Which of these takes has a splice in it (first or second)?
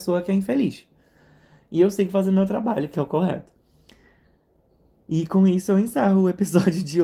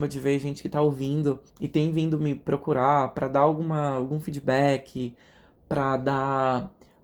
second